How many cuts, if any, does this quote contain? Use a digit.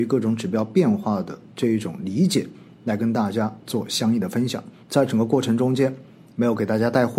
1